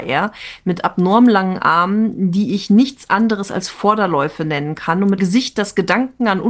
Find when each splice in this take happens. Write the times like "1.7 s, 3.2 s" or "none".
5.2 s